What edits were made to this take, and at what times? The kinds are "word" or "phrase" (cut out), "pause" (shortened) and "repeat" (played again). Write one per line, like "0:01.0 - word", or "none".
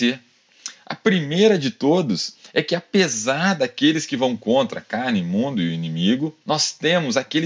0:06.4 - pause